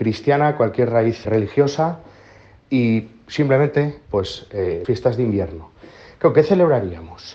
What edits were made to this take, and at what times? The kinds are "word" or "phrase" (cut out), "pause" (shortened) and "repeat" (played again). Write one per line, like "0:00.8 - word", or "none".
0:01.2 - word
0:04.1 - word
0:04.8 - word